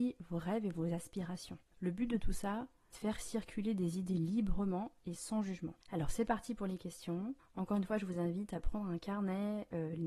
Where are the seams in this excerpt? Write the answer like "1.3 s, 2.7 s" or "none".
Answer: 1.6 s, 2.9 s, 5.8 s, 7.4 s

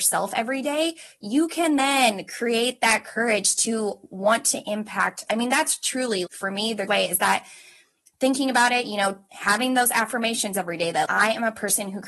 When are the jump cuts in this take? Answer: 5.3 s, 6.3 s, 6.9 s, 11.1 s

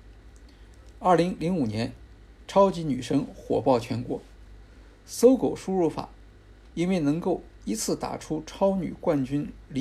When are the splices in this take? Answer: none

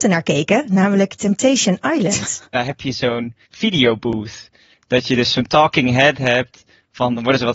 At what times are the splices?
2.5 s, 3.4 s

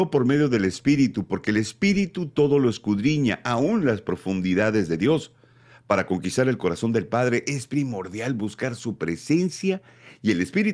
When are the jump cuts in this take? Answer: none

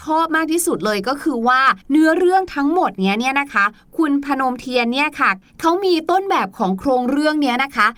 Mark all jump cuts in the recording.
1.8 s

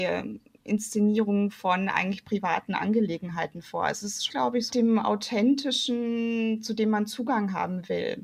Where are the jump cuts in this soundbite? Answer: 4.3 s, 4.7 s

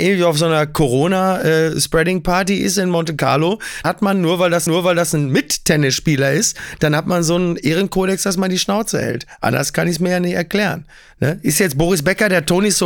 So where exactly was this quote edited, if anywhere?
3.8 s, 4.7 s

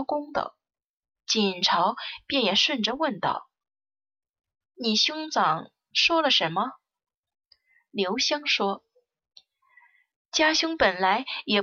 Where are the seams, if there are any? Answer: none

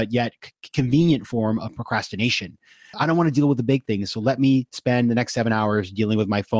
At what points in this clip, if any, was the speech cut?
none

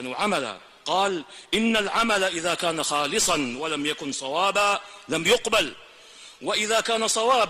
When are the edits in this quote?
none

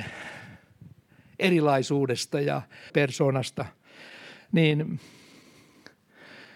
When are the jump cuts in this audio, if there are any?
2.9 s

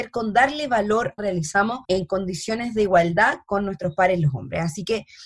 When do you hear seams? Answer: 1.2 s, 1.8 s

